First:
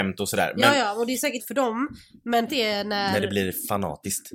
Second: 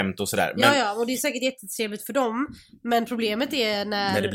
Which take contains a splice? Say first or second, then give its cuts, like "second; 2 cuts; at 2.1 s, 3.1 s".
first; 2 cuts; at 1.4 s, 2.5 s